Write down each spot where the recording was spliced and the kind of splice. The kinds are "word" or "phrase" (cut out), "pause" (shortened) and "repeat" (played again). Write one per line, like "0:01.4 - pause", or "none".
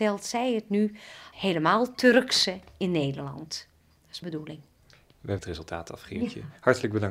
0:01.3 - word
0:04.2 - word
0:05.4 - phrase